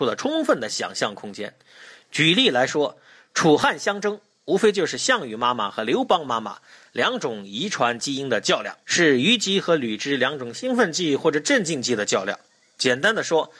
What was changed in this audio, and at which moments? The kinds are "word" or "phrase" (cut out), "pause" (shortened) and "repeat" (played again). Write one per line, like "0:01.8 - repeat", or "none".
0:08.8 - pause

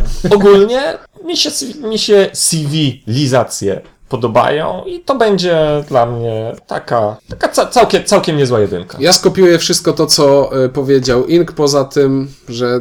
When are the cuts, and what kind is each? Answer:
0:01.1 - pause
0:07.2 - pause

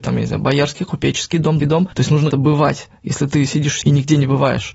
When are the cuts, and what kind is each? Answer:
0:01.6 - word
0:01.9 - pause
0:02.3 - word
0:03.8 - phrase

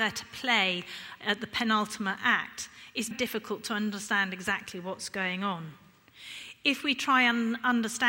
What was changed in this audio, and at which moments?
0:03.1 - word

